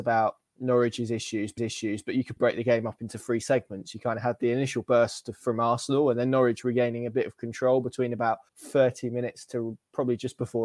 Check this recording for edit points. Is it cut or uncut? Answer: cut